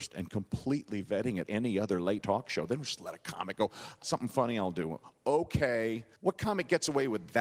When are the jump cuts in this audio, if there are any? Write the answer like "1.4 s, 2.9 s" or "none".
1.5 s, 2.2 s, 4.0 s, 6.1 s

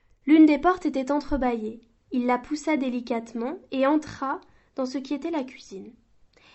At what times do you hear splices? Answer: none

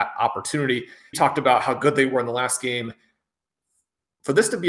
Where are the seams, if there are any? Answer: 1.1 s

